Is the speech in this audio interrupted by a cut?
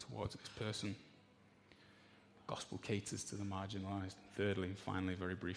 no; 0 cuts

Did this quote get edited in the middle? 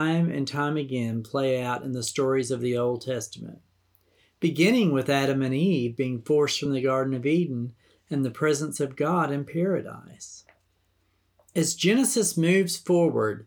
no; 0 cuts

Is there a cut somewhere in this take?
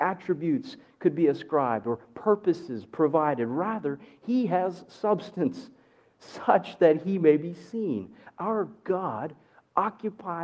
no; 0 cuts

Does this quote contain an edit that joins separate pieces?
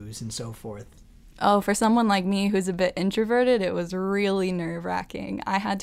no; 0 cuts

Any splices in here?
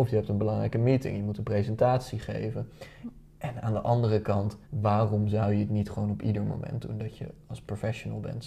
yes; 1 cut; at 4.6 s

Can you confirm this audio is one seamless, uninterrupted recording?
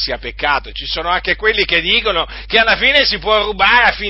yes; 0 cuts

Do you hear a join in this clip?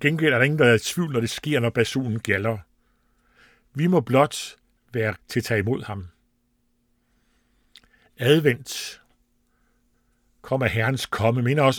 yes; 1 cut; at 5.1 s

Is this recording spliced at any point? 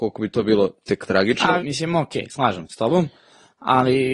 yes; 2 cuts; at 1.6 s, 2.7 s

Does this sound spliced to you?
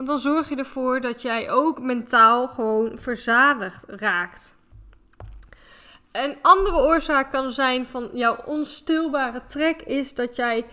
no; 0 cuts

